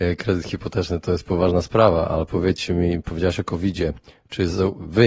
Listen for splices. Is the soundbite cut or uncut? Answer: uncut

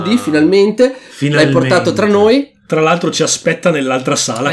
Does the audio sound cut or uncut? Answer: uncut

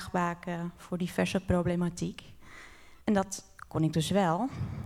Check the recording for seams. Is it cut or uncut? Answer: cut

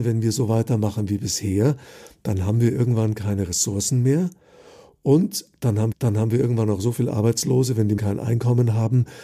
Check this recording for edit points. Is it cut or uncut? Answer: cut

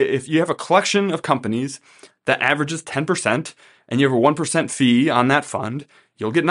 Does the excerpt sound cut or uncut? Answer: uncut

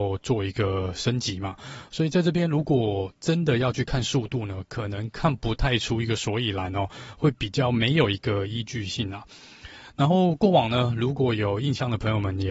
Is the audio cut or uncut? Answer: uncut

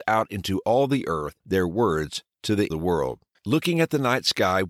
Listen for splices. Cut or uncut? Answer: cut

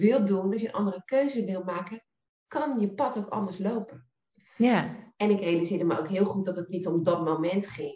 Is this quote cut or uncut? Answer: uncut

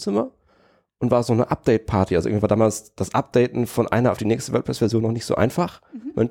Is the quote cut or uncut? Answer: uncut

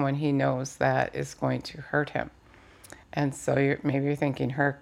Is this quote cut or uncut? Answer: cut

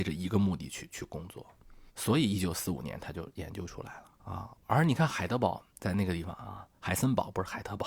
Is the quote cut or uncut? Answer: cut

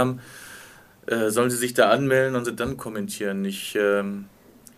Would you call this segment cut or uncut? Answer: cut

